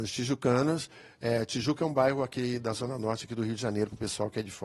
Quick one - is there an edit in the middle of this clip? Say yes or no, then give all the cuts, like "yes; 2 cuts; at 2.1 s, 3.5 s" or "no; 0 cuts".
no; 0 cuts